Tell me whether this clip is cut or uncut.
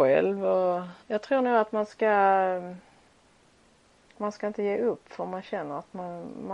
cut